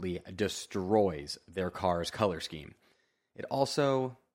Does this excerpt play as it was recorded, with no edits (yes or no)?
yes